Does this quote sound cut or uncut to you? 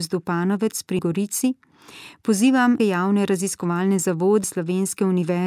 cut